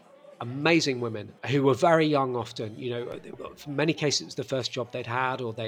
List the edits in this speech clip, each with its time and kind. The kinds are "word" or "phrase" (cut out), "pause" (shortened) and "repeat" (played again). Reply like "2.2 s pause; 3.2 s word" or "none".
1.4 s pause